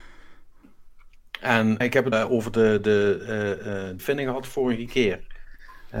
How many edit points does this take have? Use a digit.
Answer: 3